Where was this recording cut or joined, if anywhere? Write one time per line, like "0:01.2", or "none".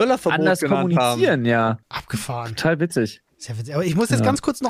0:01.8
0:03.3